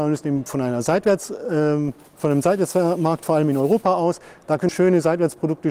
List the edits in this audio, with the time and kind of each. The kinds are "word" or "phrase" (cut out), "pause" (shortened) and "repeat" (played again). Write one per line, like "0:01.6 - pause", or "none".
0:04.7 - word